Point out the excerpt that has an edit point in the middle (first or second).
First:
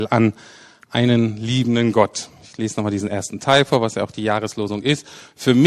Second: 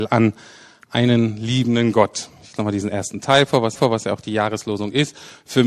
second